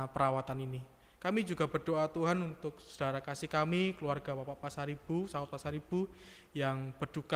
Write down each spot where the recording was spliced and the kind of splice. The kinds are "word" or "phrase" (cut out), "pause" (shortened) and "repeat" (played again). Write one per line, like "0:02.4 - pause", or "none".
none